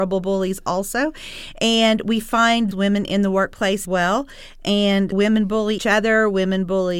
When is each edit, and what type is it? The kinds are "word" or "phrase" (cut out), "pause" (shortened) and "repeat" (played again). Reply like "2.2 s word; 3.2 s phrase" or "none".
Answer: 2.7 s word; 3.8 s word; 5.1 s word; 5.8 s word